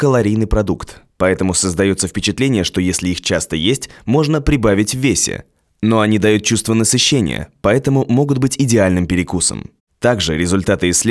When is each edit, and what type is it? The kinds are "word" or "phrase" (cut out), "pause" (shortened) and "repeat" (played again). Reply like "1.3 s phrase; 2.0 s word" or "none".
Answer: none

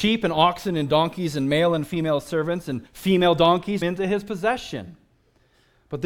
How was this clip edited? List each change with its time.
2.9 s pause; 3.8 s phrase

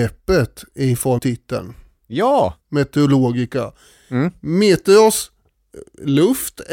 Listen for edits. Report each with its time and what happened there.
1.2 s word; 2.6 s pause

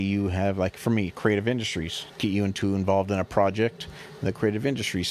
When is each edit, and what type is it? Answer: 2.1 s word

